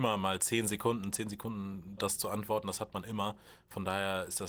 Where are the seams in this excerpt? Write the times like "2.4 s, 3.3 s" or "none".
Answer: 2.0 s